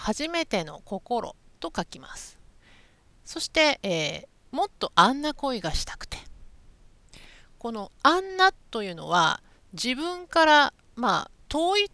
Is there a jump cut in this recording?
no; 0 cuts

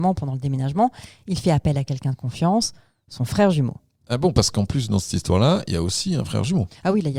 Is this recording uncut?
yes; 0 cuts

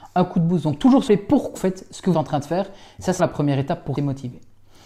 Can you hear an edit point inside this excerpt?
yes; 5 cuts; at 1.1 s, 1.5 s, 2.1 s, 3.2 s, 3.9 s

